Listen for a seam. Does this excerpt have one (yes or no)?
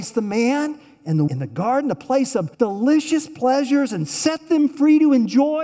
yes